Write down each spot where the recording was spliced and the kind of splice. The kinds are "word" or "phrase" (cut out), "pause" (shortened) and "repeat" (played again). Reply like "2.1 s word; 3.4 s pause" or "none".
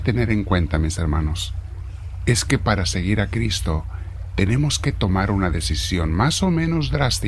none